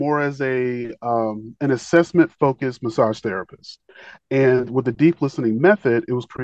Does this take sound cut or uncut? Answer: uncut